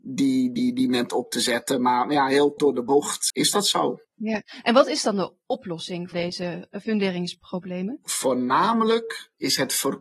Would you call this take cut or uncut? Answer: cut